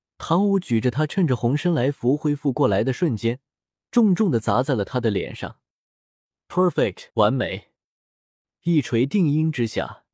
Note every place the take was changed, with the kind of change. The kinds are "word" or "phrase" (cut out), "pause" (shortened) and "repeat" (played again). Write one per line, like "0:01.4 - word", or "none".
0:07.1 - pause